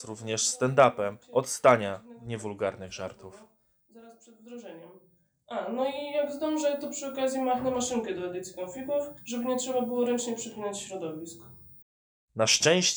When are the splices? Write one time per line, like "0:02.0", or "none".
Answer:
0:01.2
0:09.2